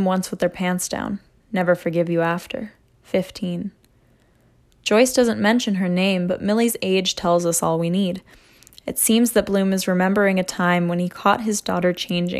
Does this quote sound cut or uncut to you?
uncut